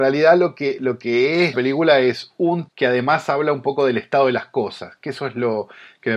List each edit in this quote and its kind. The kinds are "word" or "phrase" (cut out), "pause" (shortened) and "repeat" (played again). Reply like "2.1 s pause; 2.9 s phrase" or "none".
1.5 s word; 2.7 s word